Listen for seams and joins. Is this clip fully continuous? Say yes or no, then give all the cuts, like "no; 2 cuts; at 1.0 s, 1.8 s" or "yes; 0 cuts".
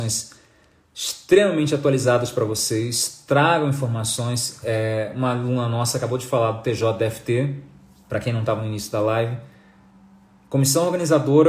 yes; 0 cuts